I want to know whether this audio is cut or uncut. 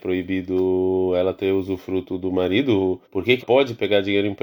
cut